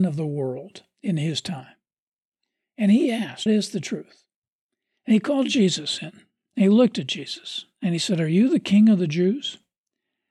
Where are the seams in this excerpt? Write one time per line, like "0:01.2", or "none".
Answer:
0:03.5